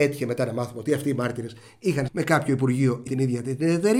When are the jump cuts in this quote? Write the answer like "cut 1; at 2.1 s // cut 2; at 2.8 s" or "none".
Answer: cut 1; at 2.1 s // cut 2; at 3.1 s